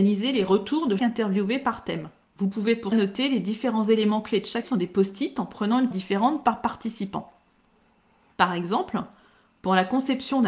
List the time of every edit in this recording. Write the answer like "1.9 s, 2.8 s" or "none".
1.0 s, 2.9 s, 4.6 s, 5.9 s